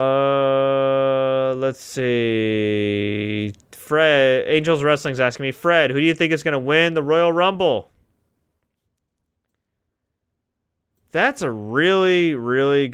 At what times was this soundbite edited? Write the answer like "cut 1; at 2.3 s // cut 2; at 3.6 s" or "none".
cut 1; at 3.6 s